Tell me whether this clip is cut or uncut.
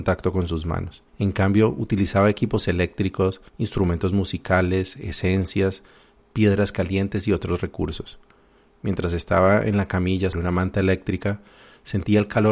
cut